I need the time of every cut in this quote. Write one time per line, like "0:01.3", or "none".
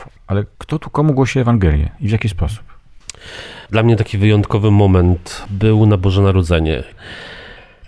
0:03.6